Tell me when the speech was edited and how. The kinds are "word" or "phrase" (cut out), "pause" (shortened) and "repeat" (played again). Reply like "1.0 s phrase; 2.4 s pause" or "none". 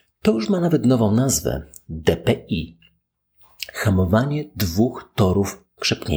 none